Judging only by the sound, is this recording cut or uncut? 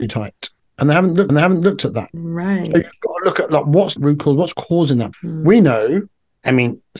cut